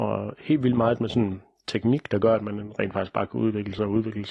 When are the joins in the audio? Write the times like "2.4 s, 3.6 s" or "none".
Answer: none